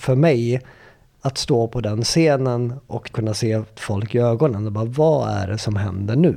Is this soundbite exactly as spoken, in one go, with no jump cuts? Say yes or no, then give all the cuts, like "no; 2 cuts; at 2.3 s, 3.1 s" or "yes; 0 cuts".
no; 1 cut; at 3.1 s